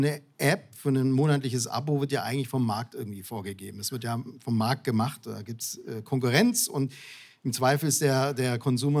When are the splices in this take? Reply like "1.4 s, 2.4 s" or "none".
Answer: none